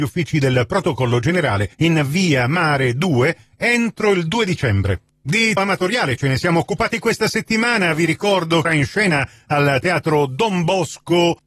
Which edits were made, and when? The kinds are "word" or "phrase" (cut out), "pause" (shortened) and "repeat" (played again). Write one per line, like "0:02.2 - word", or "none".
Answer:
0:01.7 - pause
0:05.6 - word
0:08.6 - phrase